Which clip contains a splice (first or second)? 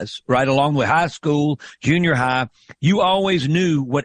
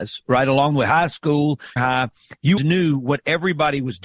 second